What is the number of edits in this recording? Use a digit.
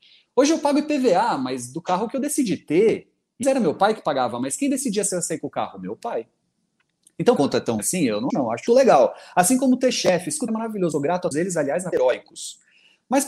9